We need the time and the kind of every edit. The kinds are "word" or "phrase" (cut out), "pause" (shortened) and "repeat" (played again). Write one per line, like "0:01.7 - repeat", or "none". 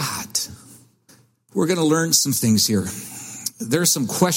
0:01.1 - pause